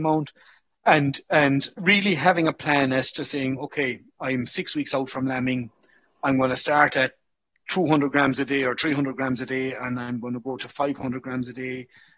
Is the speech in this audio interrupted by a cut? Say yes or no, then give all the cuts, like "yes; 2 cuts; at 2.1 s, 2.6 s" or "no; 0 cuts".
no; 0 cuts